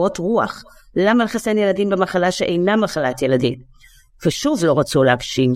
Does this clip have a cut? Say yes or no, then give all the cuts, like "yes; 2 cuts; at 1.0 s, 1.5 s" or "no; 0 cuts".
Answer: no; 0 cuts